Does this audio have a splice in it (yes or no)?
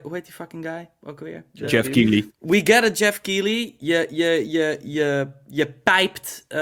no